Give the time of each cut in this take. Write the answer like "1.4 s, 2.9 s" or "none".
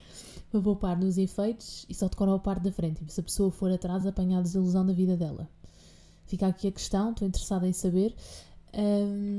none